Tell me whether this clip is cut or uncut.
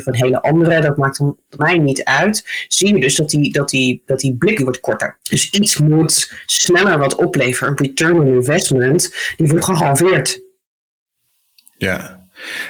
cut